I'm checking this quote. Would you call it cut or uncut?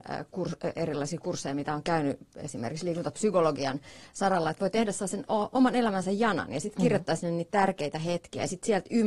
uncut